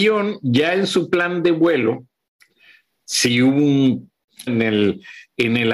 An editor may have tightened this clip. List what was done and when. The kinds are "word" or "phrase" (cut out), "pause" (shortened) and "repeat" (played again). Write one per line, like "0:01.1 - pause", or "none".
0:04.5 - word